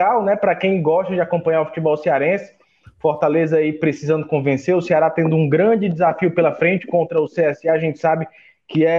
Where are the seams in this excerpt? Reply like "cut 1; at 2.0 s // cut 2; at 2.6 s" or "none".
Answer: none